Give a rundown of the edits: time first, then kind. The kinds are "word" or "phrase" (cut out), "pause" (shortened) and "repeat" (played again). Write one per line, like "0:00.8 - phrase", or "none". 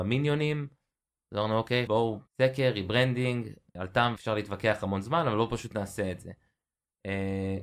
0:01.9 - word
0:02.3 - phrase
0:03.7 - word
0:04.2 - word